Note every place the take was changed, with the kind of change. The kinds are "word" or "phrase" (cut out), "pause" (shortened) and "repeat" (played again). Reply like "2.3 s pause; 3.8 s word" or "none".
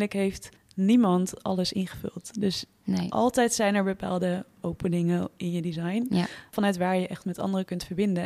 none